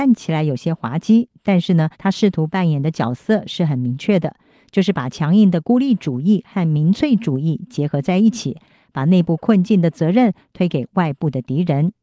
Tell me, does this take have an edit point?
yes; 1 cut; at 1.9 s

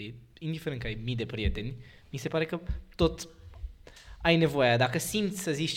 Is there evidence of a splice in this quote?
no; 0 cuts

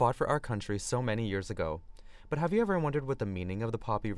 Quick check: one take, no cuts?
yes; 0 cuts

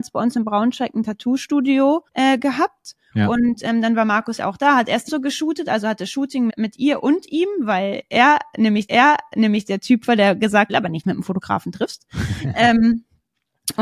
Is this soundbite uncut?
no; 7 cuts; at 2.1 s, 4.4 s, 5.1 s, 6.5 s, 8.9 s, 10.7 s, 11.0 s

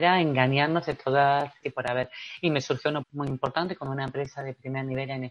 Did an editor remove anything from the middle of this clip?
yes; 2 cuts; at 1.6 s, 3.0 s

